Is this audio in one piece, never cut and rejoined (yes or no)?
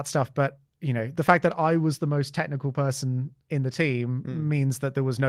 yes